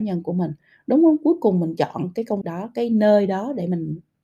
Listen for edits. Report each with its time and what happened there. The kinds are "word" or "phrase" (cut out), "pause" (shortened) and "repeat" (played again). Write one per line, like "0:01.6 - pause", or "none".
0:02.4 - word